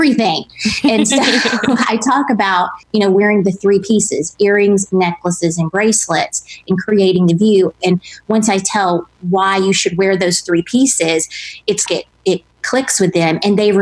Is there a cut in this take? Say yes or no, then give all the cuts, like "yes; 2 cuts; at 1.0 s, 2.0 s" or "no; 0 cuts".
yes; 2 cuts; at 2.8 s, 11.9 s